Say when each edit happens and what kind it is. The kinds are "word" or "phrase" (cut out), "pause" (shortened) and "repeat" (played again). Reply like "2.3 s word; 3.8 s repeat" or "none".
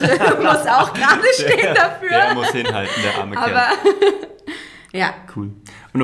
none